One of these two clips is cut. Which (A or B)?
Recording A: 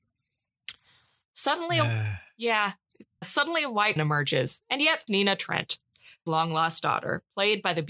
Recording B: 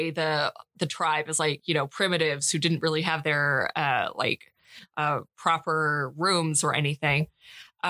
A